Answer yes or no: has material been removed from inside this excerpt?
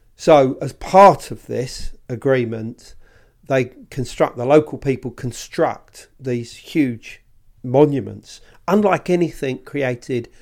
no